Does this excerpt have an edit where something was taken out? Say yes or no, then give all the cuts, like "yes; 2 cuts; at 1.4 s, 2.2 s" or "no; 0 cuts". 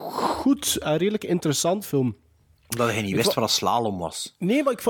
yes; 1 cut; at 1.8 s